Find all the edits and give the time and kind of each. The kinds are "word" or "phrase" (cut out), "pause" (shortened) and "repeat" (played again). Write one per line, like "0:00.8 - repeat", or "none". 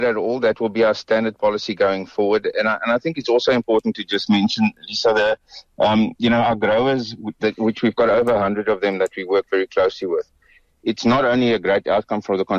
none